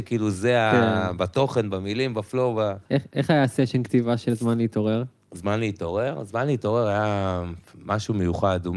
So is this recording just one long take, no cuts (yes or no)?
no